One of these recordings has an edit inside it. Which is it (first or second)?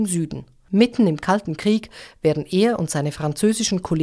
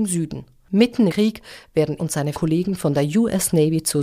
second